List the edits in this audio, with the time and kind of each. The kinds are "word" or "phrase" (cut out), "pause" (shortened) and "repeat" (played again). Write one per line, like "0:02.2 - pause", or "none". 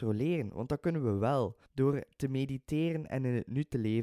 0:01.6 - pause